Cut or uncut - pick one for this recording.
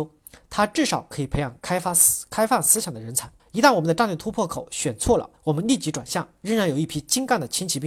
cut